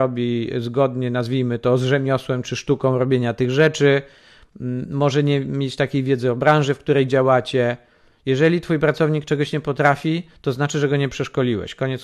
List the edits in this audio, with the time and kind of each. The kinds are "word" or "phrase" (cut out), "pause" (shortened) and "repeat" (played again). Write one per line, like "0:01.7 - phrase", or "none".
none